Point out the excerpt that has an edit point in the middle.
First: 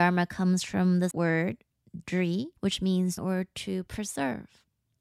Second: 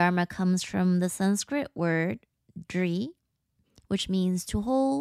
first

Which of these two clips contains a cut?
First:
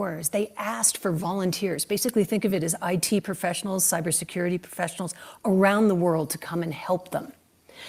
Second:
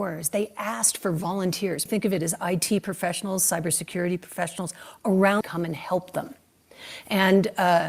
second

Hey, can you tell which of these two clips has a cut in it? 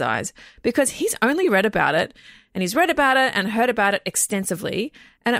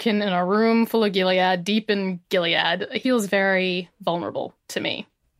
second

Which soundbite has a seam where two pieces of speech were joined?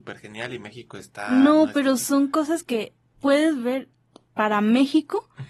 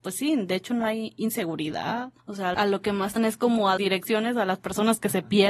second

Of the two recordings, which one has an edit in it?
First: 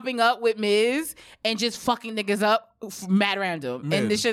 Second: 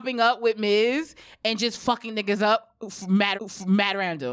second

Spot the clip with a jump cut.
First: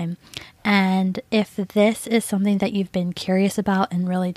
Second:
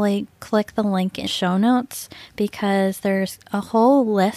second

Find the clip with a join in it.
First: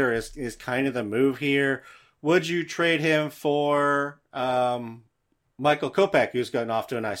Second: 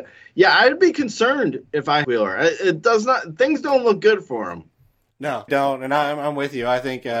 second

